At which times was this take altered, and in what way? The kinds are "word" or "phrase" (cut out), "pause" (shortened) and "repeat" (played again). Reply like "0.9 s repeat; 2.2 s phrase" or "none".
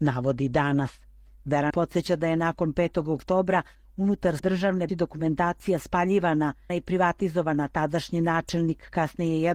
1.7 s word; 4.4 s word; 4.9 s word; 6.7 s word